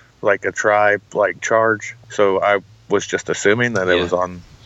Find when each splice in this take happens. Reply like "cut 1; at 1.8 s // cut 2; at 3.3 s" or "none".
none